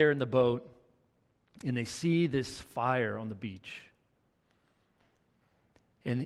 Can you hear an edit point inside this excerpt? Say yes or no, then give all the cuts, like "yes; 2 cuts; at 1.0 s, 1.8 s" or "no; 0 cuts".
no; 0 cuts